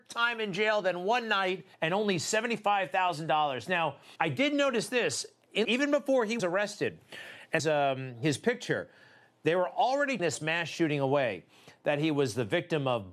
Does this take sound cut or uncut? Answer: cut